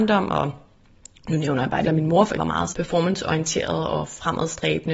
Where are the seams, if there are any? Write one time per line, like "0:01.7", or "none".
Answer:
0:01.9
0:02.4
0:02.7